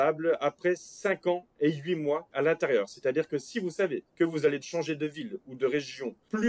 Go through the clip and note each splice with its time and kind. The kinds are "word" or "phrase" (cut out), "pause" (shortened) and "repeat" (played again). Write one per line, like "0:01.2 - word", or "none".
0:02.3 - word
0:04.1 - pause
0:04.6 - word